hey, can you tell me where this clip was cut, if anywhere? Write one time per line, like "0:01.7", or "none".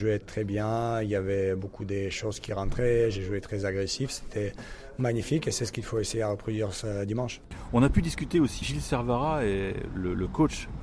0:08.6